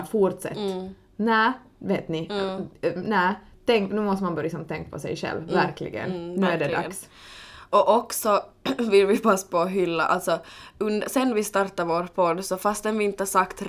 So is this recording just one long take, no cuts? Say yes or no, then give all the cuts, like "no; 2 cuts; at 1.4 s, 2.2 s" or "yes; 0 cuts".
yes; 0 cuts